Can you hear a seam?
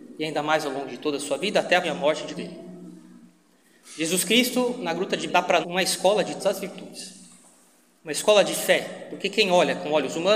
yes; 5 cuts; at 1.8 s, 2.3 s, 5.3 s, 5.6 s, 6.4 s

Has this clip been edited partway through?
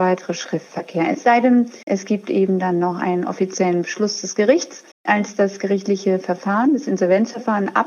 yes; 2 cuts; at 1.8 s, 4.9 s

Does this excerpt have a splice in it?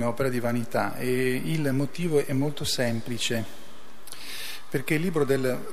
no; 0 cuts

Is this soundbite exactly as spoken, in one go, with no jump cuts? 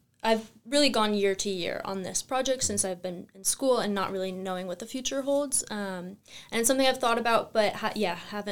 yes; 0 cuts

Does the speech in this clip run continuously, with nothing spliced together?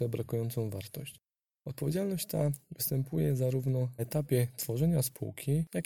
no; 1 cut; at 4.0 s

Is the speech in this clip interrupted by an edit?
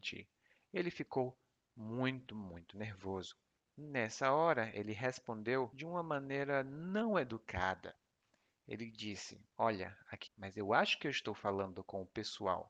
yes; 3 cuts; at 2.3 s, 9.5 s, 10.3 s

